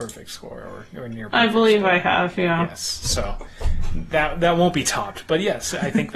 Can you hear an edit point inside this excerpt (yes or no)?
no